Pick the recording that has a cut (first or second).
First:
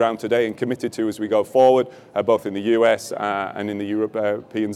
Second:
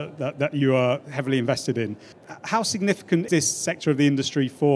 second